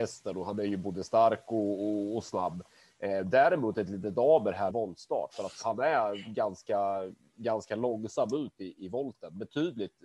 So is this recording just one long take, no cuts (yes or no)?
no